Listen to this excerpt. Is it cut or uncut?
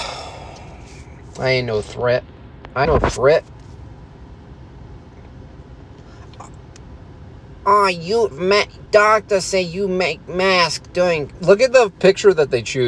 cut